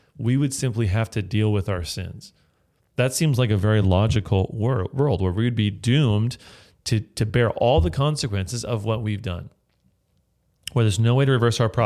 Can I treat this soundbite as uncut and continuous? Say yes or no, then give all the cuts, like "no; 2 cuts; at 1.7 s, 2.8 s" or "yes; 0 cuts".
yes; 0 cuts